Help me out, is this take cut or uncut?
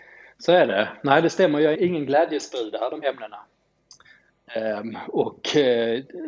cut